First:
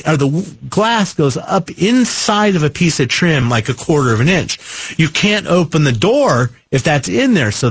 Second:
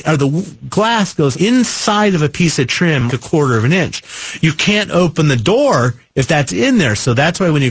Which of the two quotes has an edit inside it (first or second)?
second